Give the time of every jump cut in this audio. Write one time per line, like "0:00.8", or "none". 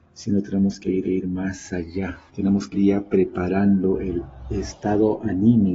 0:01.0
0:02.3
0:02.7